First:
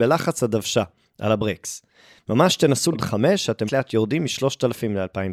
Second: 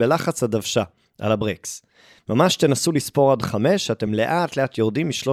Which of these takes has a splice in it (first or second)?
first